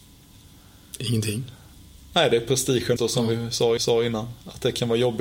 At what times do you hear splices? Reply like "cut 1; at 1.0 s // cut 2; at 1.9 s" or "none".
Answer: cut 1; at 3.0 s // cut 2; at 3.8 s